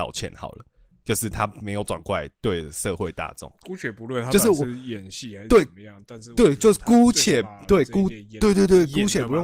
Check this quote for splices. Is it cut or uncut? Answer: uncut